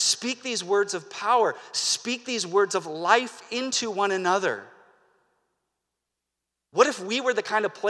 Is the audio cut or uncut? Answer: uncut